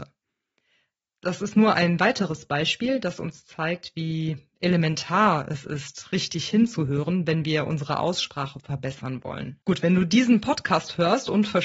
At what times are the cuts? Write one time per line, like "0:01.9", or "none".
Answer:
0:09.6